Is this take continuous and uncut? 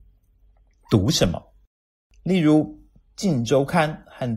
yes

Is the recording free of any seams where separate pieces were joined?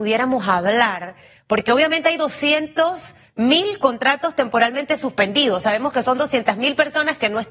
yes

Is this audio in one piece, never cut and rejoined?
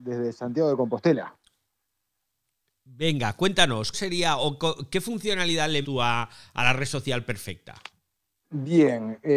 no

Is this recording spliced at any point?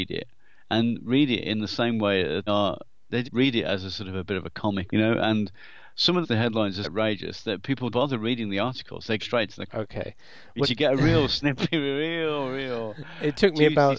yes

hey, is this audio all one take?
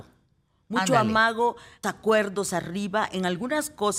no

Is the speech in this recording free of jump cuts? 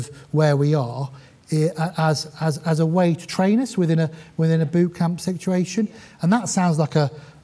yes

